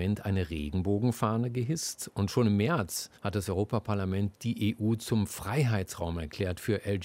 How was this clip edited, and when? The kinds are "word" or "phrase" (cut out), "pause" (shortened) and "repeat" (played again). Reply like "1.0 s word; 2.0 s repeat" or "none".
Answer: 3.2 s pause